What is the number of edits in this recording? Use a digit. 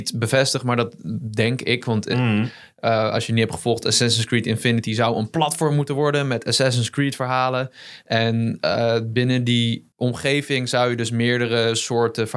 1